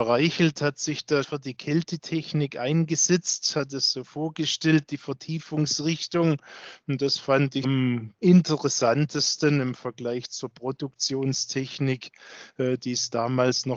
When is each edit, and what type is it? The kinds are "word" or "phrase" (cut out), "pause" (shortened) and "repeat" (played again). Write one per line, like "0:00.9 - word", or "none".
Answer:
0:01.2 - word
0:07.6 - word